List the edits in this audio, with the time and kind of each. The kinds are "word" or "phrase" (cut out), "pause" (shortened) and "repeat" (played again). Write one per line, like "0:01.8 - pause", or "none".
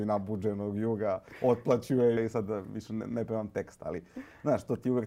0:02.2 - phrase